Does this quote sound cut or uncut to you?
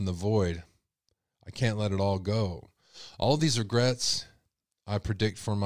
uncut